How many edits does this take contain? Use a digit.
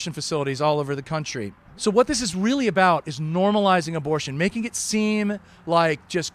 0